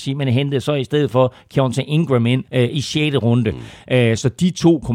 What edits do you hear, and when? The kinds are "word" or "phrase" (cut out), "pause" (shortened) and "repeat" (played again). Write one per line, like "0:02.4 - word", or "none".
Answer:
0:02.5 - pause